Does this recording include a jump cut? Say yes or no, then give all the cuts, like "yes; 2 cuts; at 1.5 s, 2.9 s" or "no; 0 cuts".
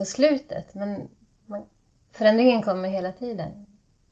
no; 0 cuts